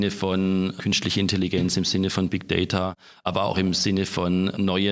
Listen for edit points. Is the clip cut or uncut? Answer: uncut